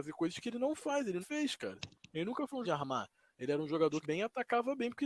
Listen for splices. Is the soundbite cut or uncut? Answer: cut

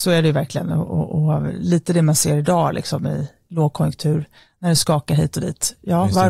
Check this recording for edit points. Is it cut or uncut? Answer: uncut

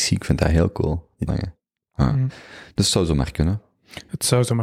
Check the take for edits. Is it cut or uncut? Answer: cut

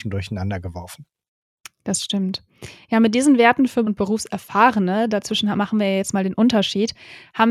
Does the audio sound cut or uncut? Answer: cut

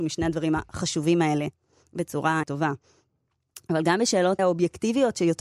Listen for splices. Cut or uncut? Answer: cut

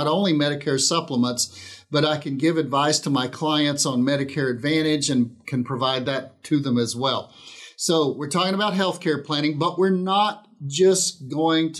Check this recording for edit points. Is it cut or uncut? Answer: uncut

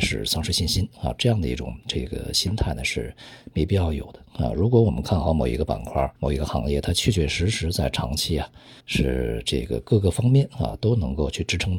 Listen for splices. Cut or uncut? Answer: cut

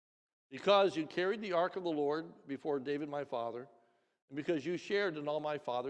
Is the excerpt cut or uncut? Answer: uncut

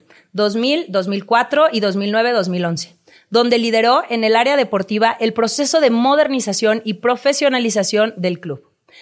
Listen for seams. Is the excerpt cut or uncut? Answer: uncut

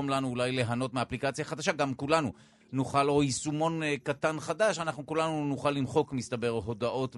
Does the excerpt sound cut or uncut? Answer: uncut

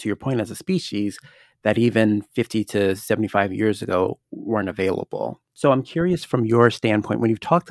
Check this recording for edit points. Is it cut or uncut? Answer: uncut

